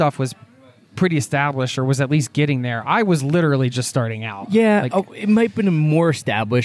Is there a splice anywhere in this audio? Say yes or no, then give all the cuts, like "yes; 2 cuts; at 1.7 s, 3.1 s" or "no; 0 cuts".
no; 0 cuts